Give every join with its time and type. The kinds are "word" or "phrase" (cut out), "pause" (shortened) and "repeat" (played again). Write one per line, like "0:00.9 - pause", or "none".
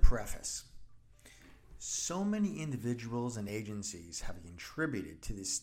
none

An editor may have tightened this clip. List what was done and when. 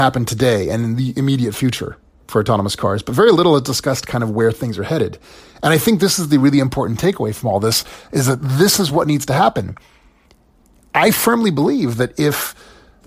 none

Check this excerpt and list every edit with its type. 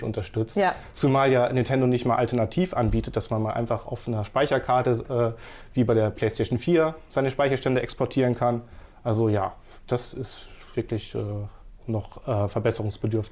none

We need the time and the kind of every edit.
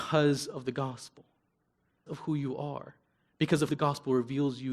0:02.1 - word
0:03.7 - word

